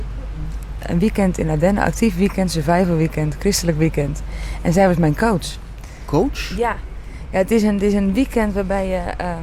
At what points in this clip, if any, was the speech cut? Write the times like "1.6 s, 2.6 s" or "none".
none